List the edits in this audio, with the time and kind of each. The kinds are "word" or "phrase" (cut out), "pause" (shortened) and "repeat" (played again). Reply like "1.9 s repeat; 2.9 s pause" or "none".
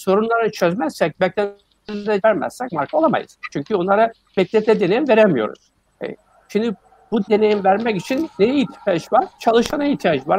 2.2 s word; 5.9 s pause; 7.3 s word